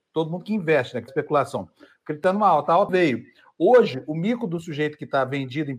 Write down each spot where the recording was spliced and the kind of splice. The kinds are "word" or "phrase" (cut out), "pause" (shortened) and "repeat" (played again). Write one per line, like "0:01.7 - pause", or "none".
0:01.1 - word
0:02.9 - word